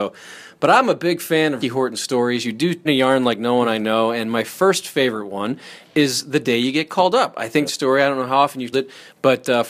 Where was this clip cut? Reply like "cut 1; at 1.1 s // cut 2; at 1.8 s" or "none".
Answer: cut 1; at 1.6 s // cut 2; at 2.8 s // cut 3; at 7.7 s // cut 4; at 8.7 s